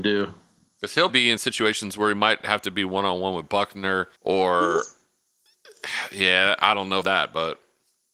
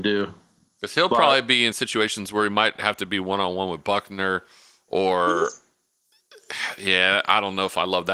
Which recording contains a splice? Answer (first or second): first